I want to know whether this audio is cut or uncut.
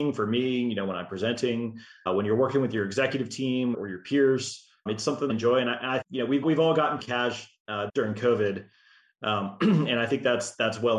cut